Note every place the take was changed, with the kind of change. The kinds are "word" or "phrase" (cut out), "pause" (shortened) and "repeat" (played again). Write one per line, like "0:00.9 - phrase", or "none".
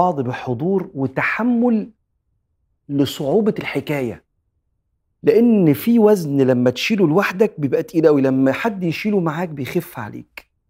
none